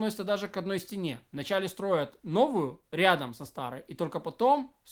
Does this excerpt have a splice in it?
yes; 1 cut; at 2.9 s

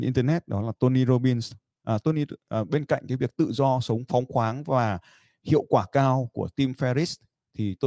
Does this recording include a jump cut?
no; 0 cuts

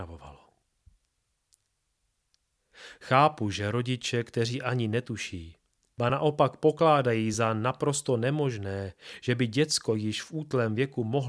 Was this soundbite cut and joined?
no; 0 cuts

